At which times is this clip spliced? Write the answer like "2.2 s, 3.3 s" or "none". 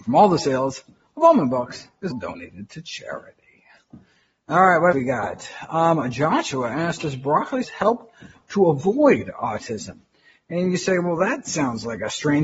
2.1 s, 4.9 s, 7.6 s